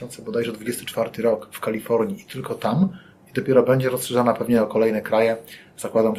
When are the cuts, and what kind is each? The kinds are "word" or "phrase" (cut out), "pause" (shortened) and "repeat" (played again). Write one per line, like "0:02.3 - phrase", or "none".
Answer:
none